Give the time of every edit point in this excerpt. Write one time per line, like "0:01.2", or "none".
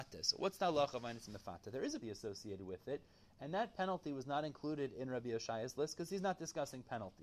0:02.0